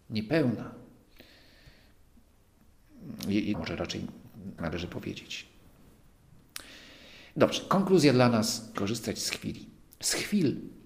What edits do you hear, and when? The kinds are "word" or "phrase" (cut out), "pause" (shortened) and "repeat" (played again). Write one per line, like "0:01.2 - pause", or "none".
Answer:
0:03.5 - word
0:04.6 - word
0:08.7 - word